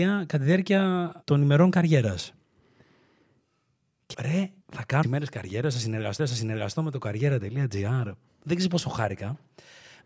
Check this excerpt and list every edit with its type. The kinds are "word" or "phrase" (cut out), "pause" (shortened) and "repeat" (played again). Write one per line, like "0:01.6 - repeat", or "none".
0:01.2 - pause
0:04.1 - word
0:04.6 - pause
0:05.0 - phrase
0:06.2 - repeat